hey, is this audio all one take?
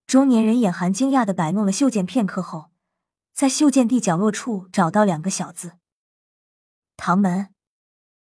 yes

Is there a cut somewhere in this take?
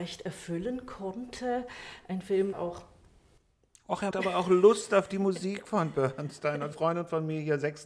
yes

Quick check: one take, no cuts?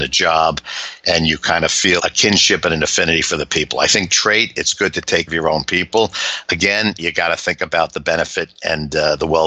no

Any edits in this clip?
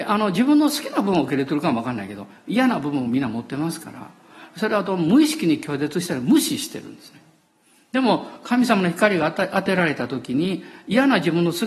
no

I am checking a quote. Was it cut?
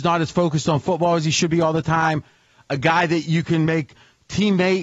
no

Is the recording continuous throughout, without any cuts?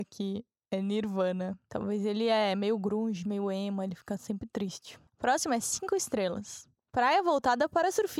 no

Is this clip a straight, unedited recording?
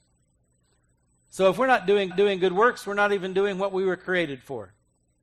no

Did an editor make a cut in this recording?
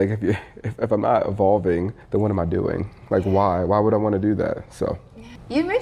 yes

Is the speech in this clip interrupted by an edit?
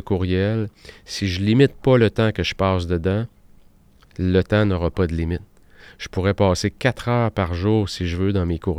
no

